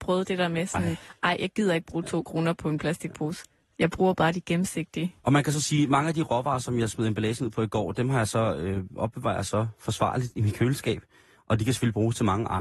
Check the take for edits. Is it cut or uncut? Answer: uncut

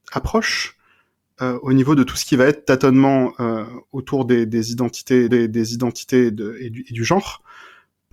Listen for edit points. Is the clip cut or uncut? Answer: cut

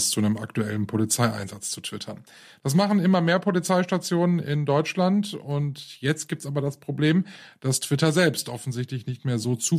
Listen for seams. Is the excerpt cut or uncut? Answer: uncut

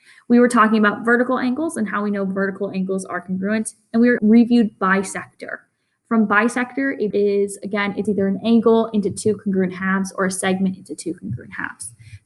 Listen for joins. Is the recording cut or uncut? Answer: cut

